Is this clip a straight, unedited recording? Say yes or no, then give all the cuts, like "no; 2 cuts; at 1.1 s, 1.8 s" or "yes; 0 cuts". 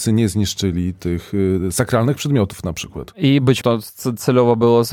no; 1 cut; at 3.6 s